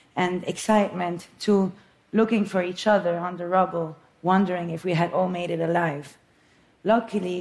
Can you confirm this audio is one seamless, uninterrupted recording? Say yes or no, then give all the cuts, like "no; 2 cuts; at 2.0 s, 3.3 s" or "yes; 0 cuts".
yes; 0 cuts